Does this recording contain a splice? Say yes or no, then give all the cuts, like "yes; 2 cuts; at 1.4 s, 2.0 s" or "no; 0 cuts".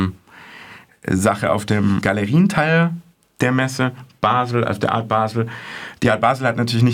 yes; 1 cut; at 2.0 s